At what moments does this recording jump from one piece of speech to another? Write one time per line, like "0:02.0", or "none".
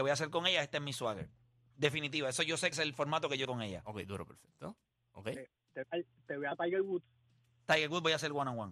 0:02.7
0:03.4
0:05.8
0:06.5